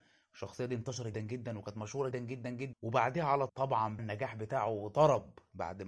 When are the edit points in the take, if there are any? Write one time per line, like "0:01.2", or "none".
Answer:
0:01.1
0:02.1
0:02.7
0:03.5
0:04.0